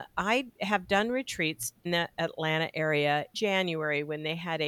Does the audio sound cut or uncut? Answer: cut